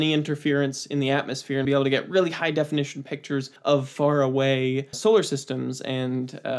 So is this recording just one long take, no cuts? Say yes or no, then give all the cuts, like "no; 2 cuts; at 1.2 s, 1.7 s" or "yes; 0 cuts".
no; 3 cuts; at 1.6 s, 3.6 s, 4.9 s